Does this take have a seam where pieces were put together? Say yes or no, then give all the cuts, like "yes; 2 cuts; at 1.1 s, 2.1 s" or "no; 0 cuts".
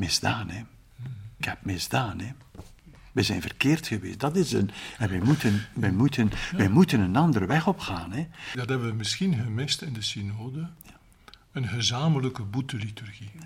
no; 0 cuts